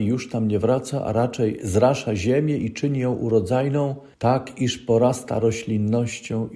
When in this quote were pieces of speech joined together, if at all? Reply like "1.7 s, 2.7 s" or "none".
4.1 s